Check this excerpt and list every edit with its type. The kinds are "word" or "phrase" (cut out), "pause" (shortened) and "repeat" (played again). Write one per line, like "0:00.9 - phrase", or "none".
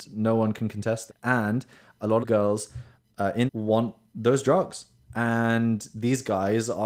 0:01.1 - word
0:02.2 - word
0:03.5 - phrase
0:05.1 - word